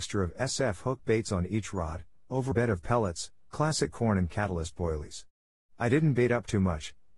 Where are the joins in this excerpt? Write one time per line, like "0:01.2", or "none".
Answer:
0:02.5